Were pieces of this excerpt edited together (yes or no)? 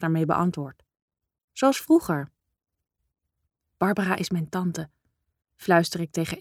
no